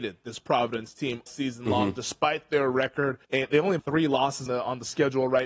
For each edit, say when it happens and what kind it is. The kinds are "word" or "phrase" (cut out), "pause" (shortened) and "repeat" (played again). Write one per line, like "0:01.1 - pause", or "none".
0:01.3 - word
0:03.2 - pause
0:03.8 - word
0:04.5 - word